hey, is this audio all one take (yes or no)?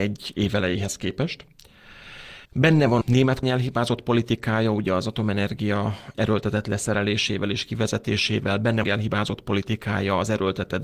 no